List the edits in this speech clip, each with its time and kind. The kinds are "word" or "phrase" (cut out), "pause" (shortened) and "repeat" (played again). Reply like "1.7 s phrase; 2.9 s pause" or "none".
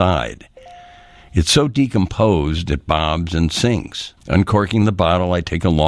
4.2 s pause